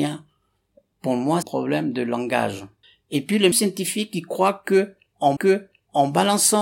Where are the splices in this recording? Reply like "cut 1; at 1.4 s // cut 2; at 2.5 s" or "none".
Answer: cut 1; at 1.4 s // cut 2; at 2.8 s // cut 3; at 3.5 s // cut 4; at 5.4 s